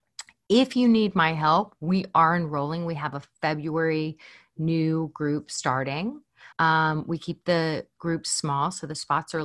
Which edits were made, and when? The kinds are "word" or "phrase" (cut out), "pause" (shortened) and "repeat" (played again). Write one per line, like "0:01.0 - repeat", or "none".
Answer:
0:06.5 - pause